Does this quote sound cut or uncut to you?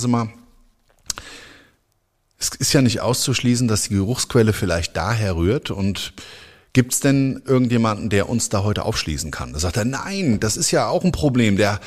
uncut